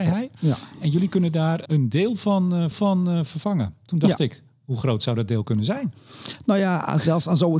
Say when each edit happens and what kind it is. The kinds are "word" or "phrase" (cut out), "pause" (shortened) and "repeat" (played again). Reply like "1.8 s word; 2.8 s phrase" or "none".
1.7 s word; 2.7 s repeat